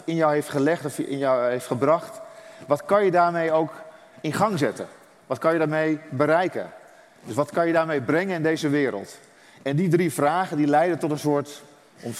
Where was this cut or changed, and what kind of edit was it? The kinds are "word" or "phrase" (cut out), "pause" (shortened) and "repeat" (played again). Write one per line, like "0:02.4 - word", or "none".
none